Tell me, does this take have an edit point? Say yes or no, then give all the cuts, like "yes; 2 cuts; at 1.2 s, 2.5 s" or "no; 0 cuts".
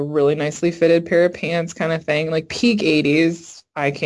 no; 0 cuts